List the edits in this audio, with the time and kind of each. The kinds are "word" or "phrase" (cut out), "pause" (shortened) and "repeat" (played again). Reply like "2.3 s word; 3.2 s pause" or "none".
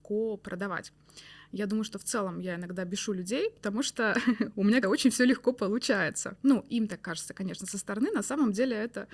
4.8 s word